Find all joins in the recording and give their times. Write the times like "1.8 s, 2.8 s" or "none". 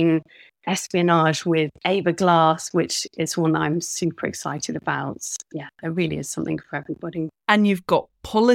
none